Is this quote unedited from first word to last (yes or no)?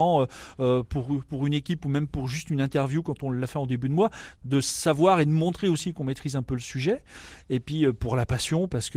yes